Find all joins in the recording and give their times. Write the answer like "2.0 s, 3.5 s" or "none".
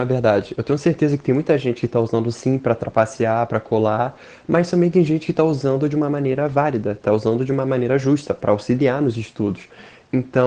none